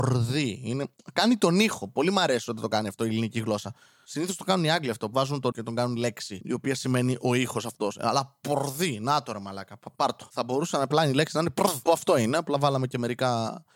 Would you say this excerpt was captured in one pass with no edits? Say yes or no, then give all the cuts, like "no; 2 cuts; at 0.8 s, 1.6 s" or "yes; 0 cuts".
no; 2 cuts; at 5.1 s, 5.5 s